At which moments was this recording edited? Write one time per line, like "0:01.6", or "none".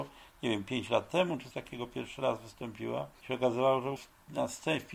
0:01.5
0:04.0

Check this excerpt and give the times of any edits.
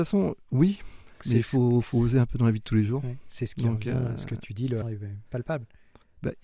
0:04.8

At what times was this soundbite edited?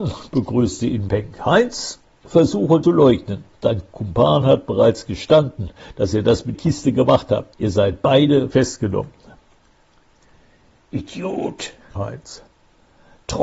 0:01.1
0:02.8
0:06.5
0:07.5
0:08.5
0:12.0

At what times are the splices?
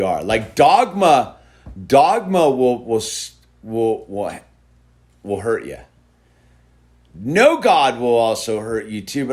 none

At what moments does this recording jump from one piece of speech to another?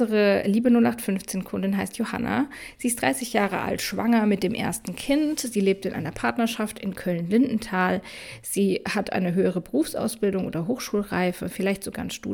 none

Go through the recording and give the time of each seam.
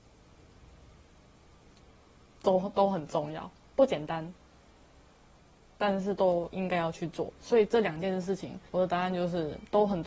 0:08.7

